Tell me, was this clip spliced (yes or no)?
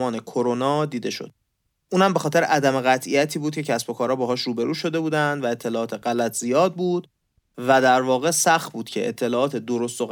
no